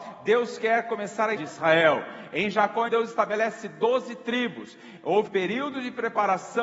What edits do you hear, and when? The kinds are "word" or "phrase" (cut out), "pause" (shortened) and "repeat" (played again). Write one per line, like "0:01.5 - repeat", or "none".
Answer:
0:01.4 - word
0:02.9 - word
0:05.3 - word